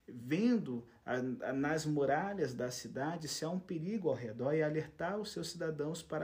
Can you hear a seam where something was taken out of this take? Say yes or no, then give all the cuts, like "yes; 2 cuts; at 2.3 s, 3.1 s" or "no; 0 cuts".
no; 0 cuts